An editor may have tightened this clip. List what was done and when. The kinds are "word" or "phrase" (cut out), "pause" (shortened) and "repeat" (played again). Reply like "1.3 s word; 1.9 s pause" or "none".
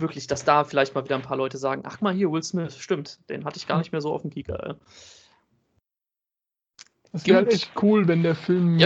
2.0 s word